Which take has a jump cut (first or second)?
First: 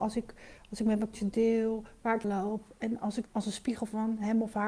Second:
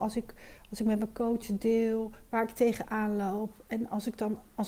first